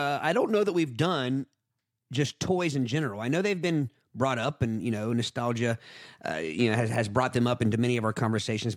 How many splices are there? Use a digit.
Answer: 0